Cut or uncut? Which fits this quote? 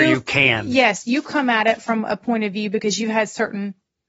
uncut